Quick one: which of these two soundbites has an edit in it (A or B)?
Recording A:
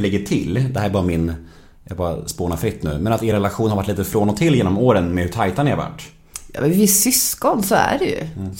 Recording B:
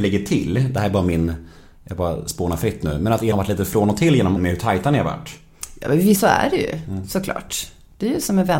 B